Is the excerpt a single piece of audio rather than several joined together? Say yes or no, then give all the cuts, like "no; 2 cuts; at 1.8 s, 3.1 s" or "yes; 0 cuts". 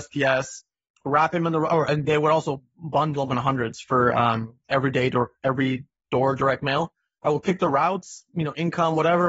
yes; 0 cuts